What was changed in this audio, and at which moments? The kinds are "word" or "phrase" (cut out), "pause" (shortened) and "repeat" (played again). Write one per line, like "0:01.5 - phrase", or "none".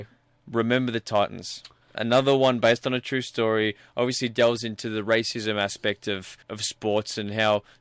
0:06.4 - pause